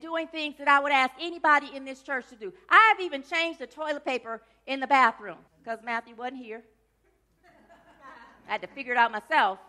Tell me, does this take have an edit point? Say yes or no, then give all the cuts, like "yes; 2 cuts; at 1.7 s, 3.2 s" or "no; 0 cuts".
yes; 1 cut; at 5.5 s